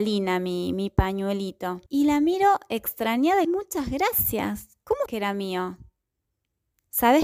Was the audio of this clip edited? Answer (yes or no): yes